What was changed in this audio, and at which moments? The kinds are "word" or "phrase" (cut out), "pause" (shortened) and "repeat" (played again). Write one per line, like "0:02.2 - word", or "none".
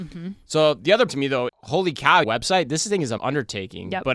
0:01.1 - word
0:01.5 - word
0:02.2 - phrase
0:03.2 - word